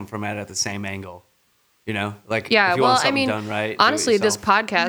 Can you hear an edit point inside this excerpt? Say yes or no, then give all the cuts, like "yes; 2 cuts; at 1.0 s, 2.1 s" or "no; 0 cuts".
no; 0 cuts